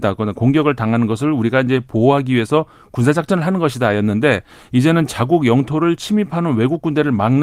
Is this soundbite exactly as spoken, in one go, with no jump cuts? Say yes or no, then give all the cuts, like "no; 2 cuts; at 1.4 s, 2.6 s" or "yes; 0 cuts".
yes; 0 cuts